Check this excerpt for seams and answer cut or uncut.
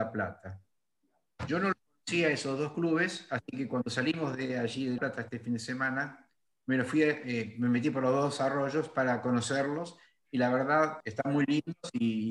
cut